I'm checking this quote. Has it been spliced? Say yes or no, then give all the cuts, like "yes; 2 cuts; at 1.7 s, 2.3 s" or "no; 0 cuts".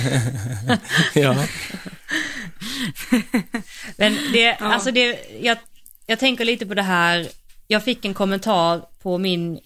no; 0 cuts